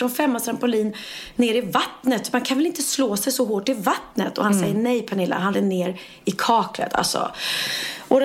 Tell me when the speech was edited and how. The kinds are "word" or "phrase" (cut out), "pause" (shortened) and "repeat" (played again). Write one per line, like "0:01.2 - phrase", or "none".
0:05.5 - word